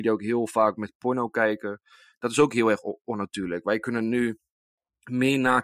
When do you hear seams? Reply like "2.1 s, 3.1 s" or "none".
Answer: none